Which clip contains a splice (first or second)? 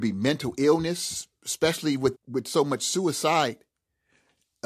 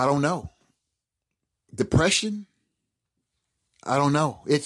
first